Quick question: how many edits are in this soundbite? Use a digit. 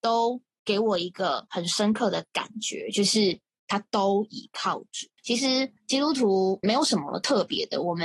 3